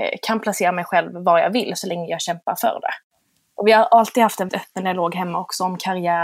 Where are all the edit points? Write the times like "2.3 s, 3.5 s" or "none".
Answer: 4.5 s